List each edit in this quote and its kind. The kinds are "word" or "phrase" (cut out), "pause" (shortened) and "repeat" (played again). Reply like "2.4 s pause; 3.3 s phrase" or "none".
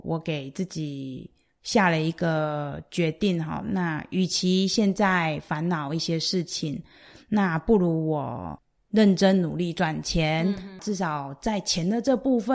none